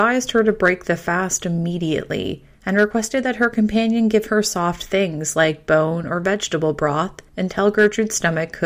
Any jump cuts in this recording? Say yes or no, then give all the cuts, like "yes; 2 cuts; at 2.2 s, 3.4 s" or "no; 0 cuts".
yes; 2 cuts; at 2.5 s, 7.3 s